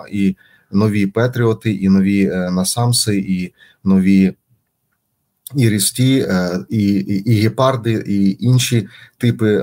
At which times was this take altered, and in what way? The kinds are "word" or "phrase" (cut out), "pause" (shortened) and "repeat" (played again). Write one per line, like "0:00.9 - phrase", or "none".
none